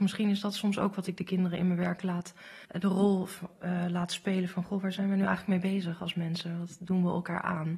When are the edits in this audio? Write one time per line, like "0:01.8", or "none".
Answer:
0:02.6